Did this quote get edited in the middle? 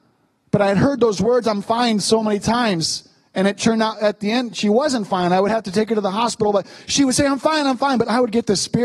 no; 0 cuts

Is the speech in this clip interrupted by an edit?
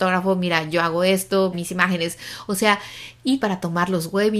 yes; 2 cuts; at 1.5 s, 3.4 s

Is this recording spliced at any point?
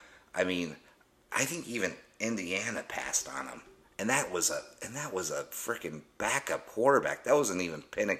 no; 0 cuts

